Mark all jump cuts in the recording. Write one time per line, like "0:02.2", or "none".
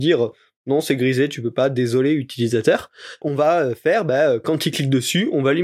0:03.2